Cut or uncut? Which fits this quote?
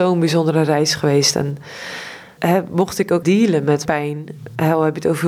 cut